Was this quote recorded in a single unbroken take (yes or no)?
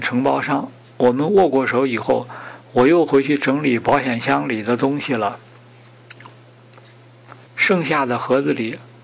no